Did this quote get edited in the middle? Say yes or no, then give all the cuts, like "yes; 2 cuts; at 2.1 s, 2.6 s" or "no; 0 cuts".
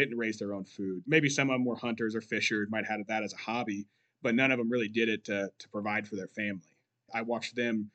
no; 0 cuts